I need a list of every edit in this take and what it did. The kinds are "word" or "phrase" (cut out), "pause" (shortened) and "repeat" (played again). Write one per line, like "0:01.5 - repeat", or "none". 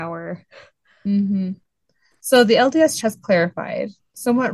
0:03.0 - word